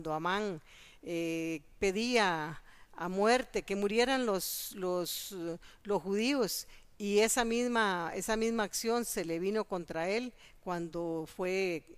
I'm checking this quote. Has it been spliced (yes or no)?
no